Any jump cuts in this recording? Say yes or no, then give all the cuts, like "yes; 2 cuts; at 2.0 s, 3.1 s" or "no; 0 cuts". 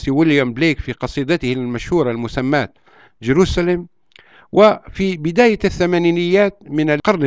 no; 0 cuts